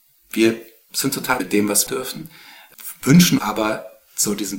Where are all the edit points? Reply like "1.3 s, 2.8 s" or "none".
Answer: 1.4 s, 1.9 s, 3.4 s